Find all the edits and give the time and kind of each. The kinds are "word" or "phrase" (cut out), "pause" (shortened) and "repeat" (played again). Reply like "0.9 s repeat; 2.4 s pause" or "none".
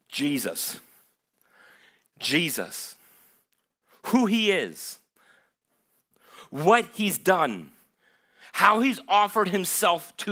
none